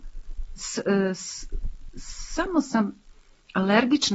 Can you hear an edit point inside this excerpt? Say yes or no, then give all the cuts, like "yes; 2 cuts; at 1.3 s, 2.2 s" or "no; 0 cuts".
no; 0 cuts